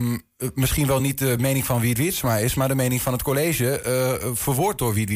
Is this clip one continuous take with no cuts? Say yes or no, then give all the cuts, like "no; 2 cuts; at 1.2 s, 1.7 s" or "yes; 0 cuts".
yes; 0 cuts